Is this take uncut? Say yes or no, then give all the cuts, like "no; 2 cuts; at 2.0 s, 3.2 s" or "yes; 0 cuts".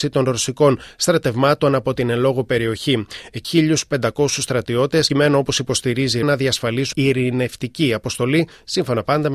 no; 4 cuts; at 3.4 s, 5.1 s, 6.2 s, 6.9 s